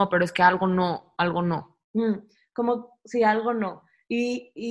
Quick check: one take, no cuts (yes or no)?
no